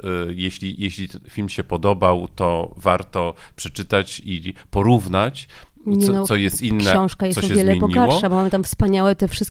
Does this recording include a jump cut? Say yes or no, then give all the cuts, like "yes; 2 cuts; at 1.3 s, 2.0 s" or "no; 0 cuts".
no; 0 cuts